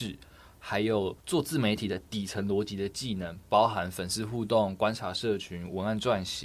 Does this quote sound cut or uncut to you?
cut